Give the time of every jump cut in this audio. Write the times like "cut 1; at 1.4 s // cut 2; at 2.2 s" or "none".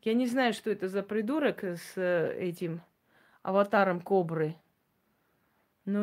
none

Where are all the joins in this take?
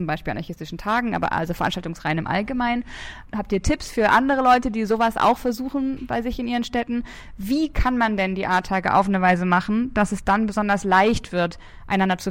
none

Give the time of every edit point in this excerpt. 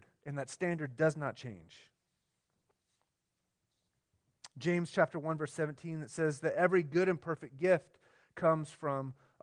none

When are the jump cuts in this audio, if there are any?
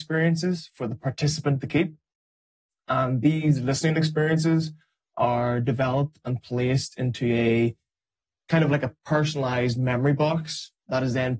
none

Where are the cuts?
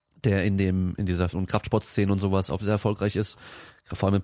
cut 1; at 1.3 s // cut 2; at 2.6 s

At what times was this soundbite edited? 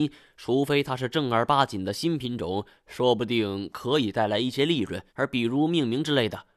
cut 1; at 5.1 s

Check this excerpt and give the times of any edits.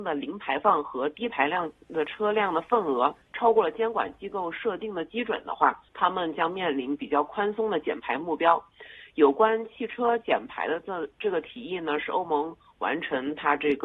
cut 1; at 3.2 s // cut 2; at 5.9 s

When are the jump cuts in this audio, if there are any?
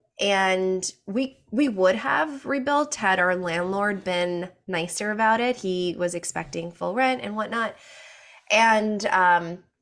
none

